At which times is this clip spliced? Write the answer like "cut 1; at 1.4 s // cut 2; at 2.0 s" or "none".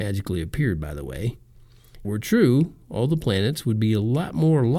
cut 1; at 2.0 s